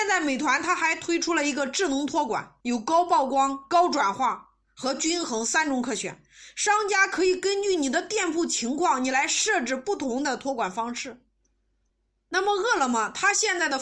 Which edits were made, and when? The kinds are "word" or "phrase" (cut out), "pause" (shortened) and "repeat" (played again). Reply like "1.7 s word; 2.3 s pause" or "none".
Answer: 2.6 s pause; 11.9 s pause